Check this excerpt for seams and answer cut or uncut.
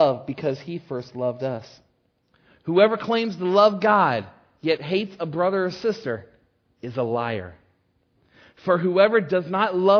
uncut